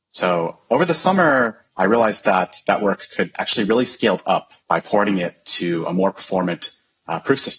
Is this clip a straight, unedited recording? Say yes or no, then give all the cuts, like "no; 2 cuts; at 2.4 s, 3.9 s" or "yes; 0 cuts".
no; 3 cuts; at 1.7 s, 3.3 s, 4.6 s